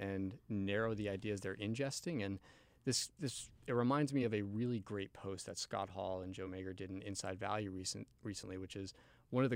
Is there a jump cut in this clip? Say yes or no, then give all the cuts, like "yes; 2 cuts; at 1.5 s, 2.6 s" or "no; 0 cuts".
no; 0 cuts